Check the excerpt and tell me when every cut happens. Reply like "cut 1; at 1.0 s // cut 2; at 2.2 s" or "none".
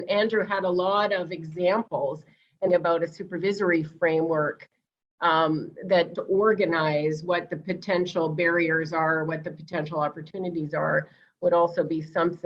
cut 1; at 2.7 s // cut 2; at 6.2 s

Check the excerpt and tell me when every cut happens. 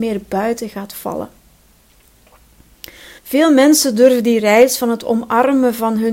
cut 1; at 3.2 s

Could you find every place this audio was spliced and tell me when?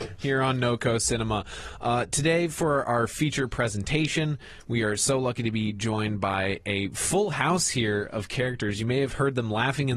none

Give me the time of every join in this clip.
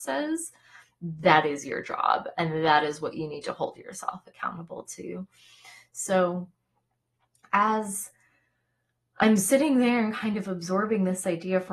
none

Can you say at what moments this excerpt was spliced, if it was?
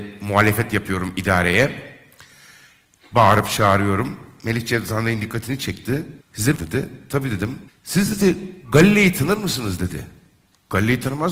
cut 1; at 6.2 s // cut 2; at 6.6 s // cut 3; at 7.7 s

